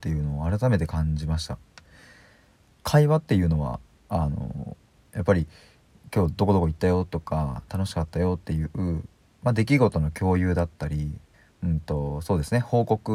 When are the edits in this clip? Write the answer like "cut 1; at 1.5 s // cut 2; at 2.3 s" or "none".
cut 1; at 3.9 s // cut 2; at 11.3 s